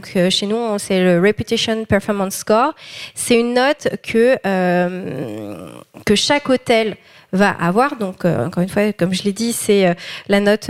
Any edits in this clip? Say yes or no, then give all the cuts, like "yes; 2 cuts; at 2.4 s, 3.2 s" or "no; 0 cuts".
no; 0 cuts